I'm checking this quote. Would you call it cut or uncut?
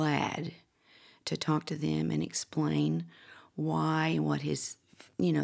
uncut